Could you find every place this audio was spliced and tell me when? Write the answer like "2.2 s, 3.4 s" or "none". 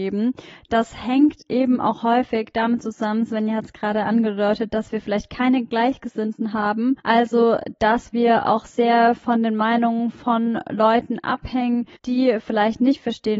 7.0 s, 12.0 s